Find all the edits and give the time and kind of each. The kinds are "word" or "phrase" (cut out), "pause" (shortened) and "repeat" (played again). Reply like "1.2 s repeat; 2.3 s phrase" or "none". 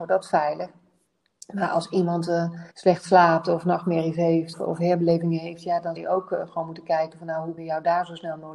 2.7 s pause; 4.5 s word; 6.0 s word; 7.6 s word